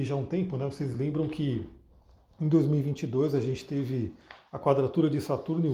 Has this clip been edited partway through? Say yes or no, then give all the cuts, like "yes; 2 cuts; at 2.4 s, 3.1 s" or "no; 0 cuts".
no; 0 cuts